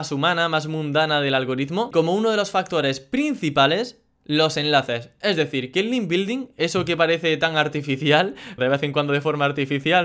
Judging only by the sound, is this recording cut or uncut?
cut